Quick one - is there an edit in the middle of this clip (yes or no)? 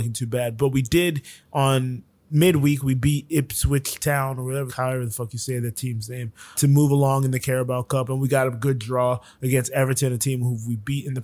yes